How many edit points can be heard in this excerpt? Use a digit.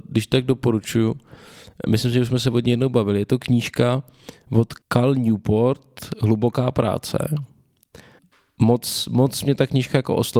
2